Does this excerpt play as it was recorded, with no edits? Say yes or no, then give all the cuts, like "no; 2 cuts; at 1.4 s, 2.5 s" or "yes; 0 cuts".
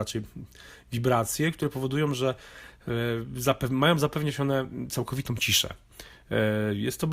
yes; 0 cuts